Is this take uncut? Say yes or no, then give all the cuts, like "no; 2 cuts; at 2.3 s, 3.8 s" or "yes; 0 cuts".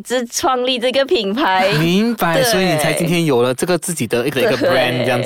no; 1 cut; at 4.3 s